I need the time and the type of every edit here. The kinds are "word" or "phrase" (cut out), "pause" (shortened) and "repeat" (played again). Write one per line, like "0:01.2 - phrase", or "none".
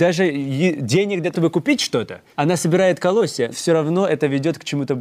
0:01.3 - word
0:02.3 - pause
0:03.5 - word